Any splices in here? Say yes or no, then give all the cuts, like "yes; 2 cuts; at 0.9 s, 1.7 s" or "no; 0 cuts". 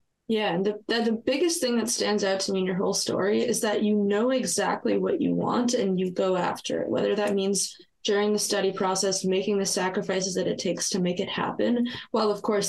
no; 0 cuts